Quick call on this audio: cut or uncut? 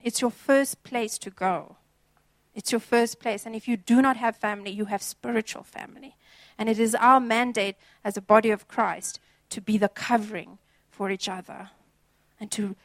uncut